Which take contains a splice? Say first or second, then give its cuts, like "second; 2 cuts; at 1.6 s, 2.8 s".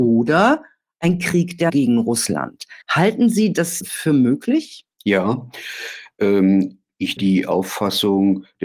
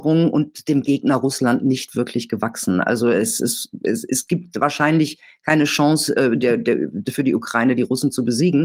first; 5 cuts; at 1.7 s, 2.8 s, 3.8 s, 4.9 s, 7.2 s